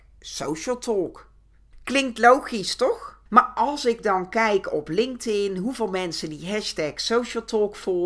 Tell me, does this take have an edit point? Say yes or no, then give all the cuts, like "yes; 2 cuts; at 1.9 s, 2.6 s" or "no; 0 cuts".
yes; 1 cut; at 3.3 s